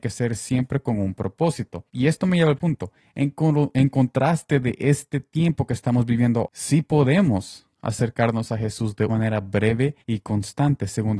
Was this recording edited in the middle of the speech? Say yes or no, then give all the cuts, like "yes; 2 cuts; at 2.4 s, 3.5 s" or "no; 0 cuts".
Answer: yes; 5 cuts; at 1.9 s, 2.6 s, 6.5 s, 9.1 s, 10.0 s